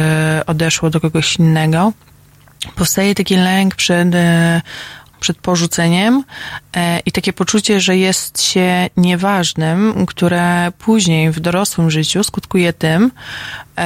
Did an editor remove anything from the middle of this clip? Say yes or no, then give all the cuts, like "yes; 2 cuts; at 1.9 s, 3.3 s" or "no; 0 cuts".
yes; 1 cut; at 5.1 s